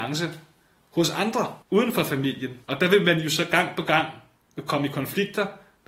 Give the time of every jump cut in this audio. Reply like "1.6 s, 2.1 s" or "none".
1.6 s, 2.6 s